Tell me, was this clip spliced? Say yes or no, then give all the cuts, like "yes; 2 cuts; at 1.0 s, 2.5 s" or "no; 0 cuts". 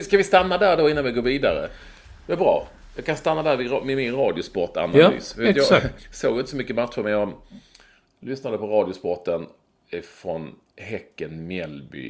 yes; 1 cut; at 6.0 s